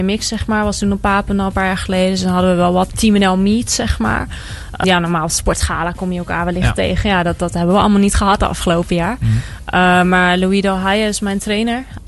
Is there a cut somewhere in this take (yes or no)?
yes